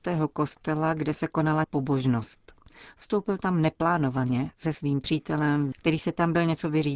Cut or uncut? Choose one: cut